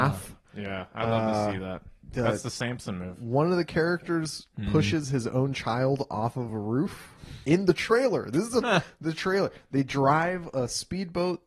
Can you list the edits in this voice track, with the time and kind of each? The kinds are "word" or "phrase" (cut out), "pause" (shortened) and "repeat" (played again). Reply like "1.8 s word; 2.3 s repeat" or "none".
none